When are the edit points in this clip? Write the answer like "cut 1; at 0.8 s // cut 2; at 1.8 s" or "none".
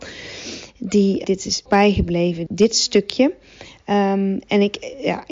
cut 1; at 1.2 s // cut 2; at 1.7 s // cut 3; at 2.5 s